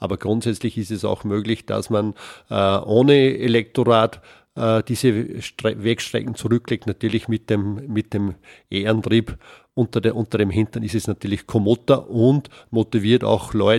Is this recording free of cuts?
yes; 0 cuts

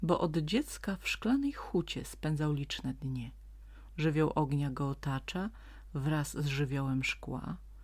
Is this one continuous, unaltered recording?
yes; 0 cuts

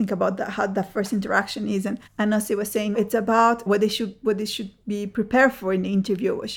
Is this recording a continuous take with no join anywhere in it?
no; 3 cuts; at 2.1 s, 2.9 s, 3.7 s

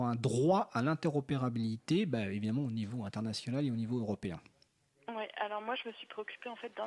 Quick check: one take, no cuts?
yes; 0 cuts

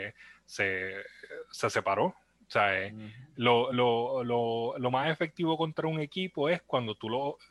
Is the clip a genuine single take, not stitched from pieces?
yes; 0 cuts

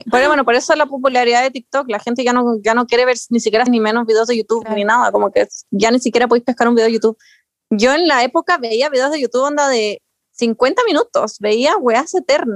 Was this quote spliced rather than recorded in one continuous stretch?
yes; 1 cut; at 3.7 s

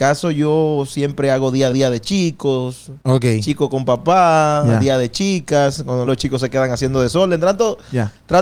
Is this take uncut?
no; 3 cuts; at 1.7 s, 3.0 s, 6.1 s

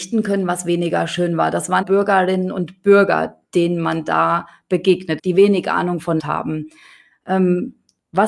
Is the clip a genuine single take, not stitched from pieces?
no; 4 cuts; at 1.8 s, 3.4 s, 5.2 s, 6.2 s

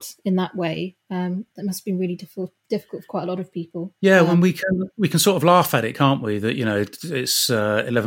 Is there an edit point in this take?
yes; 1 cut; at 4.0 s

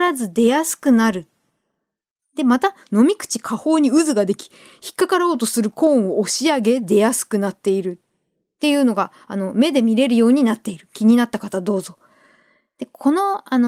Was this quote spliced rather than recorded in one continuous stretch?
no; 0 cuts

